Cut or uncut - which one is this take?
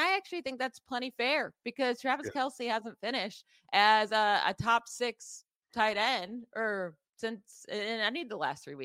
uncut